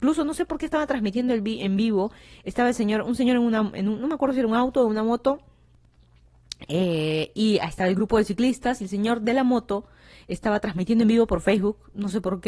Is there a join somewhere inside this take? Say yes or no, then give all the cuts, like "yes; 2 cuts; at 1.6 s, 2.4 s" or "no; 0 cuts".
no; 0 cuts